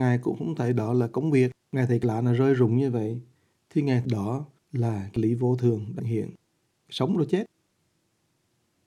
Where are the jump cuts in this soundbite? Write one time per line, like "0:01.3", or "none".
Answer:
0:01.6
0:04.0
0:04.6
0:06.0